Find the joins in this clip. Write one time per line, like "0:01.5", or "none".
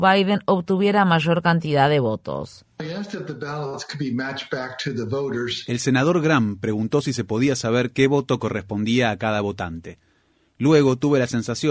none

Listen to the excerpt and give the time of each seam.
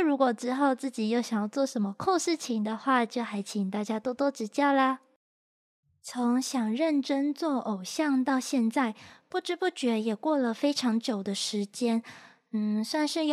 none

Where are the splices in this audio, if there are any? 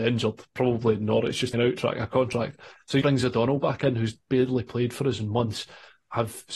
0:01.5
0:03.0

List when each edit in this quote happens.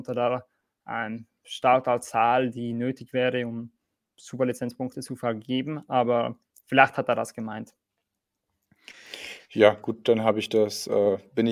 none

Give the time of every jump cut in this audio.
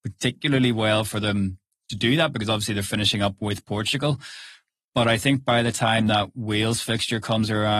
none

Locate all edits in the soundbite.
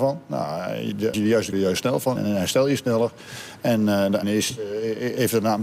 0:01.1
0:01.5
0:02.2
0:04.2

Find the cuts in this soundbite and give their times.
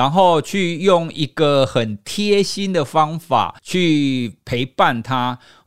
0:03.6

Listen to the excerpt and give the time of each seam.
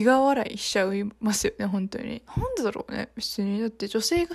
0:02.3

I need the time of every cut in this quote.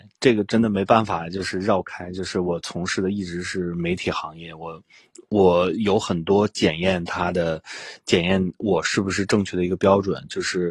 none

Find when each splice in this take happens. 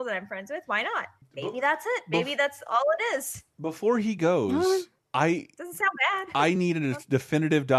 none

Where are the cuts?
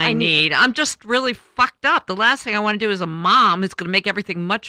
none

